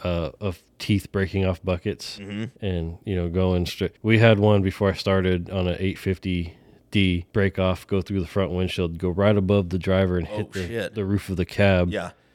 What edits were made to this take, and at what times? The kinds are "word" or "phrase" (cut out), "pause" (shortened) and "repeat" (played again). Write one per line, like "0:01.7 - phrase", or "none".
0:02.6 - pause
0:04.0 - pause
0:07.3 - pause